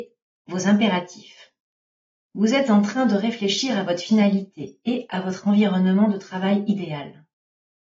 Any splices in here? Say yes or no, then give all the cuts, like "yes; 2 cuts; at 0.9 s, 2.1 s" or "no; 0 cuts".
no; 0 cuts